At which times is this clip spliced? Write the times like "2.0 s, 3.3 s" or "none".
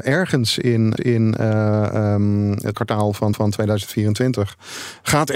1.0 s, 2.7 s, 3.3 s